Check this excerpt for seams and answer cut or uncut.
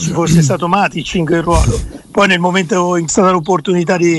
cut